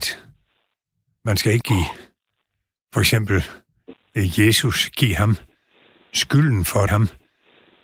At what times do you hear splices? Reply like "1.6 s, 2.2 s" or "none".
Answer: 1.6 s, 6.9 s